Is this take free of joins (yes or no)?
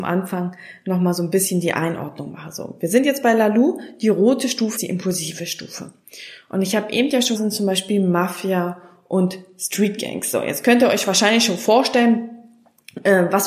no